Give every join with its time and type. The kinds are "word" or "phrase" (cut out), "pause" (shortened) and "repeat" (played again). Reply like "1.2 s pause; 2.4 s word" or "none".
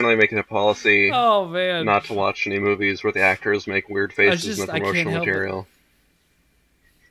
none